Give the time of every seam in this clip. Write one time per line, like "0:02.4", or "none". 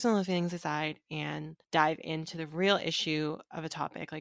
0:01.6